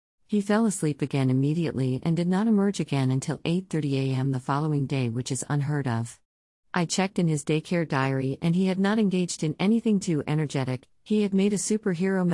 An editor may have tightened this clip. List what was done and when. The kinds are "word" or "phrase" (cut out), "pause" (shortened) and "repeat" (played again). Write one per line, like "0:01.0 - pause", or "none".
none